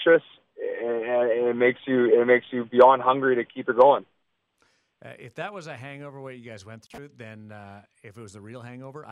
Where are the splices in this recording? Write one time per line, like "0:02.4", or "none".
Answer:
none

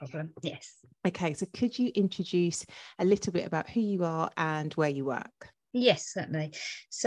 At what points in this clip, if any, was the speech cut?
0:00.9

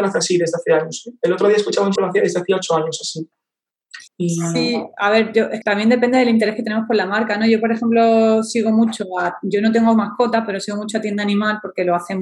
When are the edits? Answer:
0:02.0
0:04.1
0:05.6

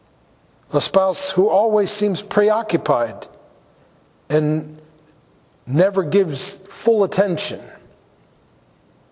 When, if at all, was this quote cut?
none

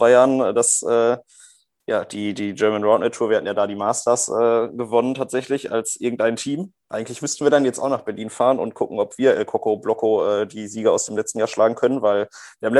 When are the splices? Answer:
none

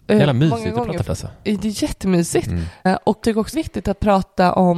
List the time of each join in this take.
0:01.0
0:03.2
0:03.5

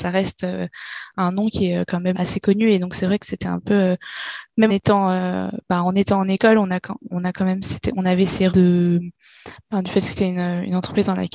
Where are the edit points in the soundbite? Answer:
0:01.1
0:02.1
0:04.7
0:07.1
0:08.5

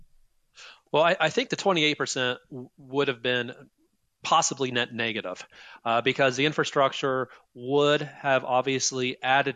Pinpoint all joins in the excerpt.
none

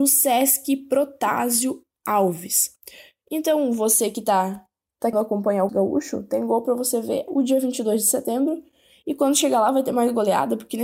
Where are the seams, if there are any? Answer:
0:05.1
0:05.7
0:07.3

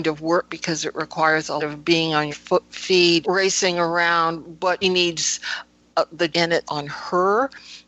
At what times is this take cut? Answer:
0:01.6
0:02.3
0:03.2
0:04.8
0:06.3
0:06.6

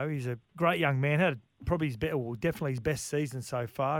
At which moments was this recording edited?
none

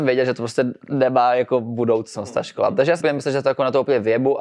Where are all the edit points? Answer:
0:03.0

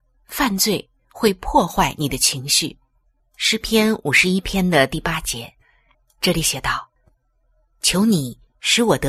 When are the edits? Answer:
0:03.2
0:05.9
0:07.0

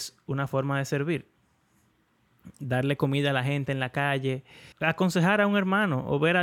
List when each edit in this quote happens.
0:04.7

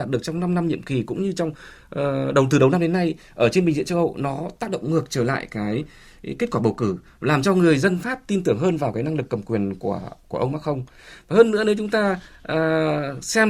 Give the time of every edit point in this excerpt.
none

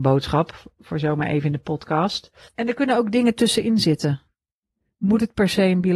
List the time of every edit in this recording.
none

